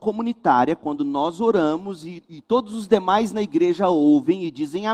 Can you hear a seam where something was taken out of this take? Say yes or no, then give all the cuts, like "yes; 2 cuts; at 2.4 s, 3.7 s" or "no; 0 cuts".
no; 0 cuts